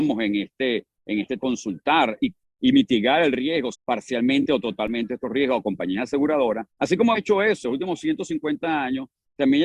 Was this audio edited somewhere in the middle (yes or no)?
yes